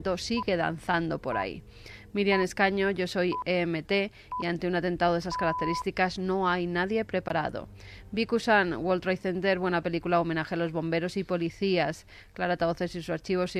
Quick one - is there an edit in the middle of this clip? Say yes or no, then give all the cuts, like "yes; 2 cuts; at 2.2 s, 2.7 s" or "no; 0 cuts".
no; 0 cuts